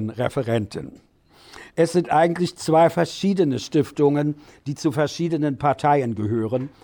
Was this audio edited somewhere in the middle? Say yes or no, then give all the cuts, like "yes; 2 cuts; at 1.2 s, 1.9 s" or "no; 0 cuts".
no; 0 cuts